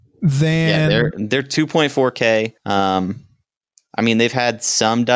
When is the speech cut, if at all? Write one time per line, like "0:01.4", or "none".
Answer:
0:02.6